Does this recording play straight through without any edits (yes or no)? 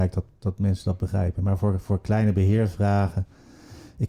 yes